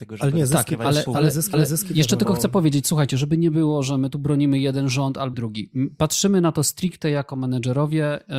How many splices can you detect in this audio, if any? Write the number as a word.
two